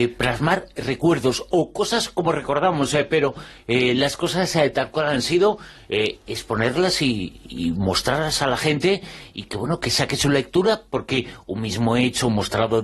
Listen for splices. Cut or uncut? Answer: uncut